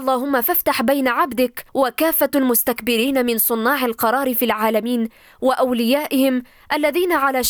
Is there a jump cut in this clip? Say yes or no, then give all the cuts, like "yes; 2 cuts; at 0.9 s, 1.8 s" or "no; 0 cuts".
yes; 1 cut; at 1.7 s